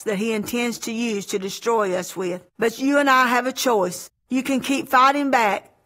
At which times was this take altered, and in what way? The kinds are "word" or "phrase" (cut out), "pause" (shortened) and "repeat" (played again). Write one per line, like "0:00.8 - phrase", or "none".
0:02.5 - pause
0:04.2 - pause